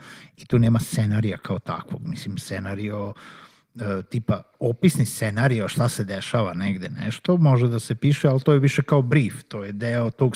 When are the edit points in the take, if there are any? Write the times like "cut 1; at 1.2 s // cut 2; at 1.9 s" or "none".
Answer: none